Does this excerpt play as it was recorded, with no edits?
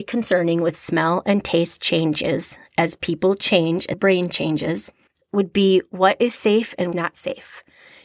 no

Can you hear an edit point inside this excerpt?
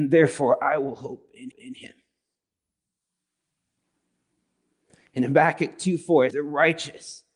yes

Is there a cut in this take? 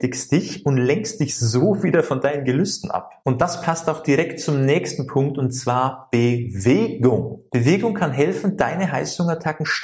no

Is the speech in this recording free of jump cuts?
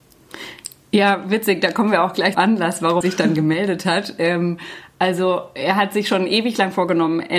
no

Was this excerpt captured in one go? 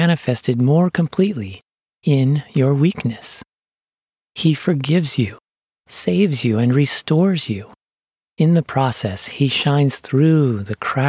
yes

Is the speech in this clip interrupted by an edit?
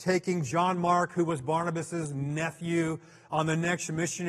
no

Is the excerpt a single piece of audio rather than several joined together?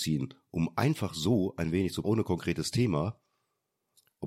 no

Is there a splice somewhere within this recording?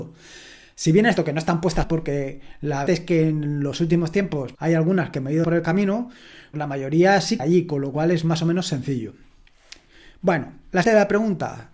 yes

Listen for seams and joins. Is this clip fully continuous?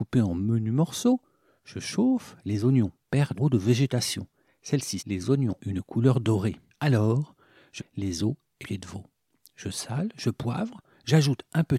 no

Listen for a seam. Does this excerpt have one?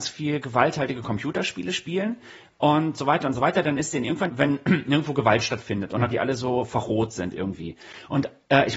yes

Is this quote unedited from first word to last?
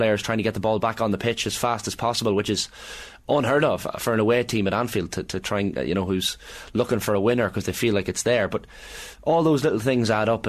yes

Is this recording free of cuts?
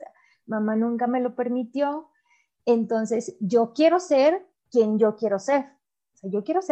yes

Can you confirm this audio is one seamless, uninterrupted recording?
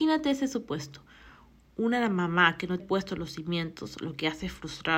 no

